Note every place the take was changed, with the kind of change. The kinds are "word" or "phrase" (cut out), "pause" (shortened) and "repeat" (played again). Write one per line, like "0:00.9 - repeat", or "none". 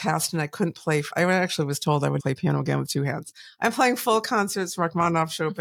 0:01.1 - word
0:02.2 - word